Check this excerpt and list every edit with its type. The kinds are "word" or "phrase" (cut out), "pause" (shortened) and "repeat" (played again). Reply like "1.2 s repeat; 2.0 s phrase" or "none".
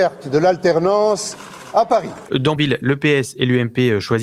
2.6 s word

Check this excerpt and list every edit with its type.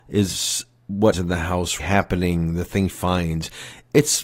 1.1 s word; 1.8 s word; 2.9 s word

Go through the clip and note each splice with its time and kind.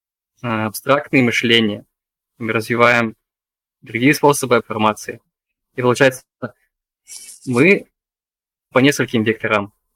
4.6 s word; 8.7 s word

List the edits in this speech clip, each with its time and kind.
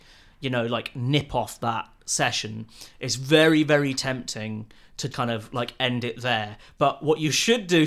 5.1 s word

